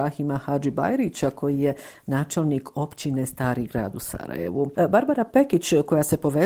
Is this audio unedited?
yes; 0 cuts

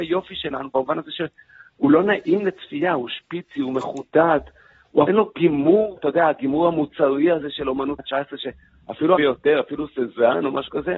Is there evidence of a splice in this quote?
yes; 4 cuts; at 5.1 s, 6.0 s, 8.0 s, 9.2 s

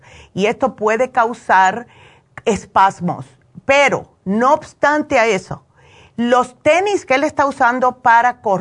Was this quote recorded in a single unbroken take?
yes; 0 cuts

